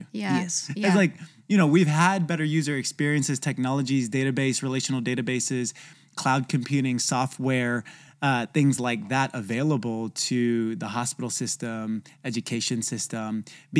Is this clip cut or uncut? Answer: uncut